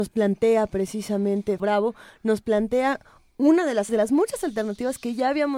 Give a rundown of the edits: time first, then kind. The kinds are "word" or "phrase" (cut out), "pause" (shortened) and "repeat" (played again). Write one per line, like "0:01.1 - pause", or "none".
0:01.6 - word
0:03.9 - word